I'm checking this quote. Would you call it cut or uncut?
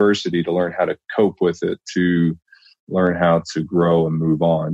uncut